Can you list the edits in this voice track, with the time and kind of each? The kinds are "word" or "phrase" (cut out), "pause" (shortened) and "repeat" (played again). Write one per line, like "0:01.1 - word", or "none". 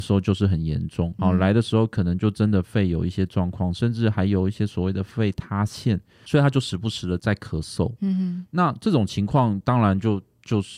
0:01.2 - word